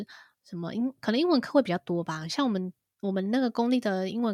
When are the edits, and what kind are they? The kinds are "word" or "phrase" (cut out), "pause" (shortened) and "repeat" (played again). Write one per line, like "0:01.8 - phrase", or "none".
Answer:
none